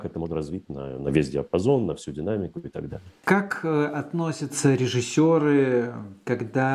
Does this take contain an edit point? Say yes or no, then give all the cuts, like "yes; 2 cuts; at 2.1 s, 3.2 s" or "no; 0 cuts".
yes; 1 cut; at 3.2 s